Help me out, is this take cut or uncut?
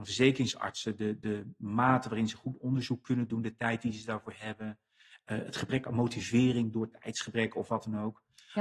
uncut